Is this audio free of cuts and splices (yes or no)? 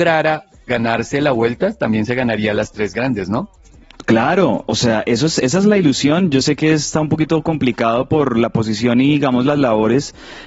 yes